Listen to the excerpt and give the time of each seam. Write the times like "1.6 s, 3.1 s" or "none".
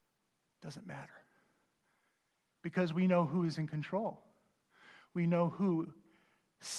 none